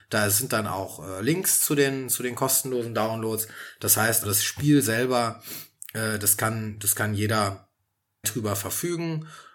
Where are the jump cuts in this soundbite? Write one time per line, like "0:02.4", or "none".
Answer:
0:04.2
0:08.2